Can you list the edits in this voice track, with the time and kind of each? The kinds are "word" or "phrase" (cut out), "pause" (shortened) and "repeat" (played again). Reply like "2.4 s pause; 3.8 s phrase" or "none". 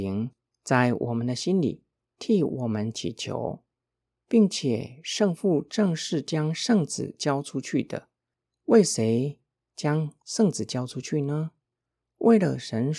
none